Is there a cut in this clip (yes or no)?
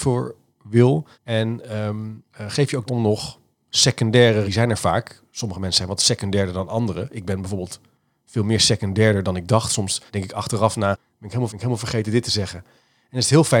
yes